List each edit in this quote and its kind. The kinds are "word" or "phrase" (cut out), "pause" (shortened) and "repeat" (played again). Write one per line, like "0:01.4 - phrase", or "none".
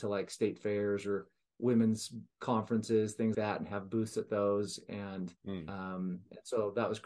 0:03.3 - word
0:05.4 - pause